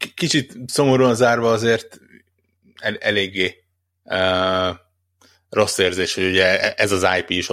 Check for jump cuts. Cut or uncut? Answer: uncut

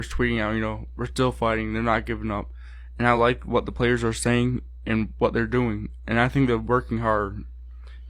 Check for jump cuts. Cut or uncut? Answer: uncut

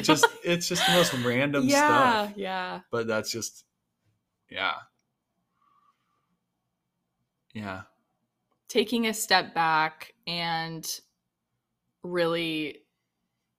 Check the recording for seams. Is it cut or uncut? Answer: uncut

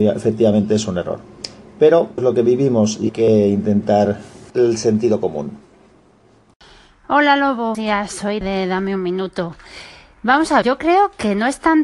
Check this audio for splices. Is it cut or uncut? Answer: cut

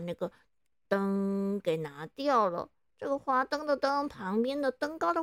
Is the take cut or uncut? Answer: uncut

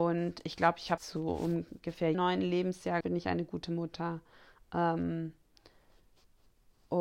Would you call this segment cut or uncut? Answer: cut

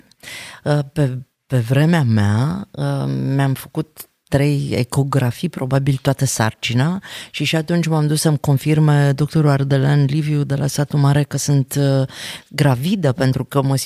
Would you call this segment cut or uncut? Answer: uncut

